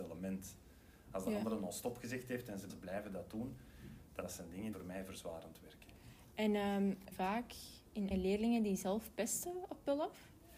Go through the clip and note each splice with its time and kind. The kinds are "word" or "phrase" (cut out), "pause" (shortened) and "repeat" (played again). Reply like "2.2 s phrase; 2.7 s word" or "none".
2.7 s phrase; 4.2 s word; 4.7 s word; 7.1 s phrase; 8.1 s word